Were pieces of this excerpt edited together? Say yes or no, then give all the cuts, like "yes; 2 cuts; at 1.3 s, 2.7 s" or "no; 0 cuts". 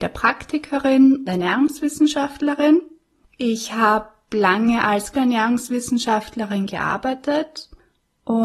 yes; 2 cuts; at 1.3 s, 5.1 s